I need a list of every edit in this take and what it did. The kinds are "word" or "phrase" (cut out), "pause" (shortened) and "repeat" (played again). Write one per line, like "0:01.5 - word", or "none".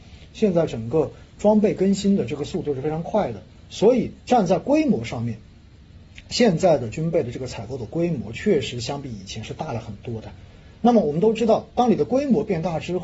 0:04.2 - pause